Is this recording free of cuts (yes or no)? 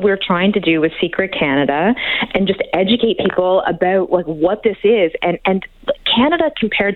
yes